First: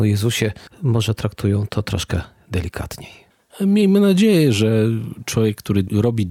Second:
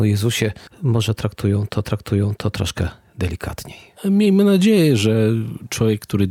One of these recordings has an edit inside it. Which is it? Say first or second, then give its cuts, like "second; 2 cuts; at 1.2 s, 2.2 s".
second; 2 cuts; at 1.8 s, 3.9 s